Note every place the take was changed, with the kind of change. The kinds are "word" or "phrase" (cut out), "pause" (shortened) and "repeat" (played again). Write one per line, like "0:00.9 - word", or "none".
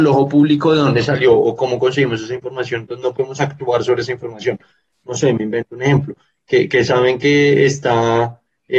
none